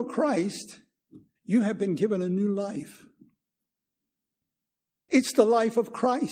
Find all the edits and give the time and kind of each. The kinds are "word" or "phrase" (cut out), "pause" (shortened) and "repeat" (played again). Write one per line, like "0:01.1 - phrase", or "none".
0:01.4 - pause